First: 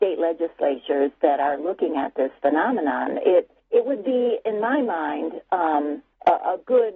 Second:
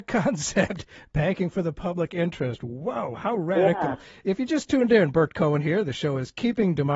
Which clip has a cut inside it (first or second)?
first